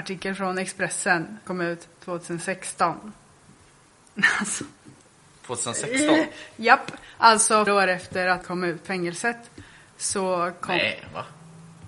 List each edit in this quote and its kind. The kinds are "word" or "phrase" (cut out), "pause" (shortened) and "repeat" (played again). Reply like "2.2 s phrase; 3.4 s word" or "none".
1.5 s word; 7.7 s word; 8.4 s word; 8.8 s word